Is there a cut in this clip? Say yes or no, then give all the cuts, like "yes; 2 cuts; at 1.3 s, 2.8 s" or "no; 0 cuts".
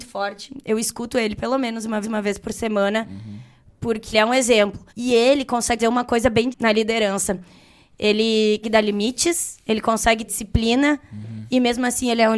yes; 7 cuts; at 2.0 s, 4.1 s, 4.9 s, 5.8 s, 6.5 s, 8.6 s, 10.3 s